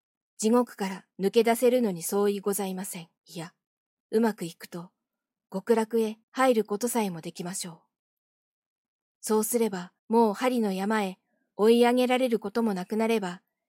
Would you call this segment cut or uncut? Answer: cut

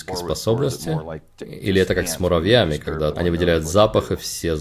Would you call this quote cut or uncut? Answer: cut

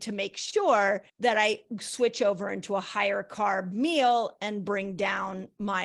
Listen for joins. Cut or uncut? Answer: cut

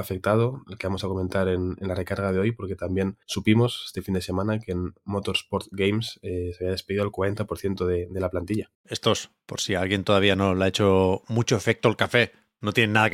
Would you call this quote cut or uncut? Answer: cut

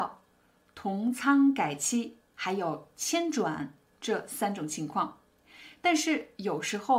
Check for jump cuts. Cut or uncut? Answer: cut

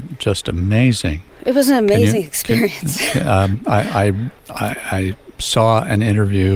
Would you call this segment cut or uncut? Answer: cut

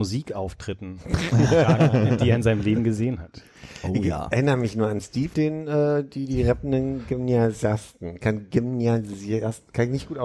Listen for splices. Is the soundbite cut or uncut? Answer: cut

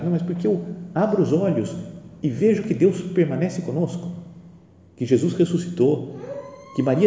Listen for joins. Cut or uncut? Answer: uncut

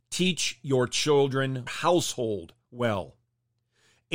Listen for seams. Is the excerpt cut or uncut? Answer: cut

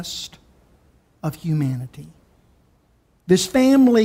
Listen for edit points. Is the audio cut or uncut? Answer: uncut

